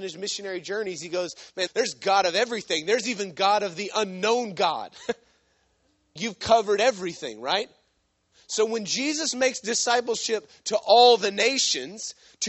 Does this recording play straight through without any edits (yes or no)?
no